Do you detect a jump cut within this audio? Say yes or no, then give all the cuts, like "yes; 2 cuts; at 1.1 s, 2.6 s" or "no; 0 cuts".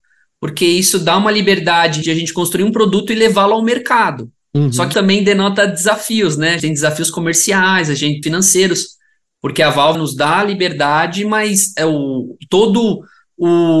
yes; 5 cuts; at 2.0 s, 4.9 s, 6.6 s, 8.2 s, 9.9 s